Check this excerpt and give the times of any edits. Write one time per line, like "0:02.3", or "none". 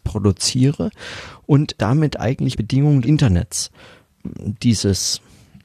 0:01.8
0:02.5
0:03.0